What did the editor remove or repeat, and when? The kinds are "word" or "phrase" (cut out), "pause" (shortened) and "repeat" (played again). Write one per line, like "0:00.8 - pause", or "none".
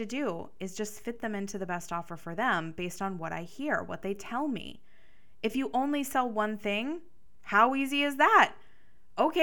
none